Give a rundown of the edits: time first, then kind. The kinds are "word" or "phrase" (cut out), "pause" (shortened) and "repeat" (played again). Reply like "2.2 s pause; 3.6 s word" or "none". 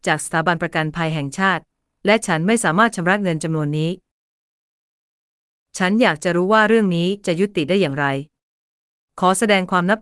none